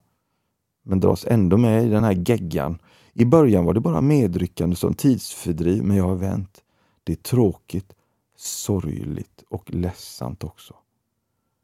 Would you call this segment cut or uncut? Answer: uncut